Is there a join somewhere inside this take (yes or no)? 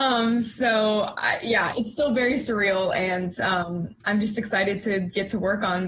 yes